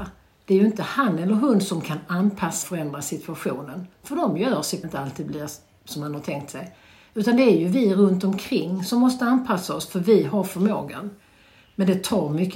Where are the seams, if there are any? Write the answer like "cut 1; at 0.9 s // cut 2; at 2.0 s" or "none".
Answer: cut 1; at 2.6 s // cut 2; at 4.8 s